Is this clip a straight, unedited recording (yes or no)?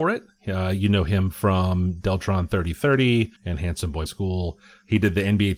no